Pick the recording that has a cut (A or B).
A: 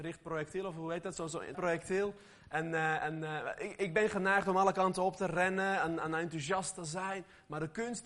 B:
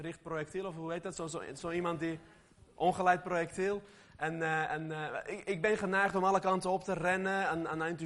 A